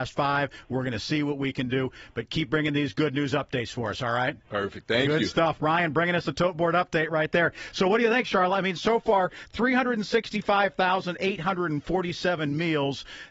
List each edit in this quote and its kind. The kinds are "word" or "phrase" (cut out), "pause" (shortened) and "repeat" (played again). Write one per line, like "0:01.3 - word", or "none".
none